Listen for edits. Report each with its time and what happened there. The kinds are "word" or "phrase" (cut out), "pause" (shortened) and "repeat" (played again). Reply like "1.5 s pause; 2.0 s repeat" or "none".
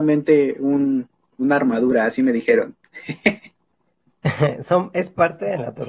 none

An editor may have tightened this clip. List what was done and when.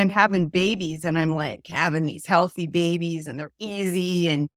none

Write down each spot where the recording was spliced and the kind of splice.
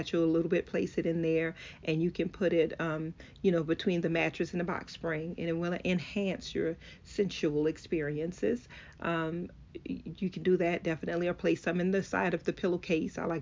none

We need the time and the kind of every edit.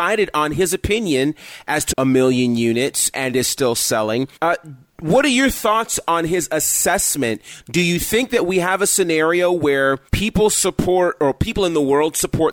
1.9 s phrase; 3.1 s word; 4.4 s pause; 10.1 s pause

